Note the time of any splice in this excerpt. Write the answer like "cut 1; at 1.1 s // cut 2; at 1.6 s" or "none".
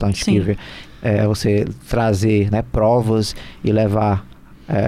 none